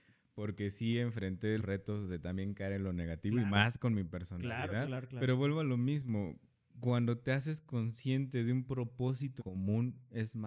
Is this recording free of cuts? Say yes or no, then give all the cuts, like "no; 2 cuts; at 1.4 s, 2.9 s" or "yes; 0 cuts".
no; 3 cuts; at 1.6 s, 4.8 s, 9.4 s